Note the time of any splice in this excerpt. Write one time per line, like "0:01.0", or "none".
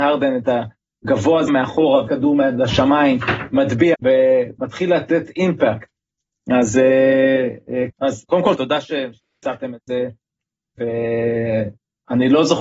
0:01.5
0:02.1
0:03.9
0:07.9
0:08.6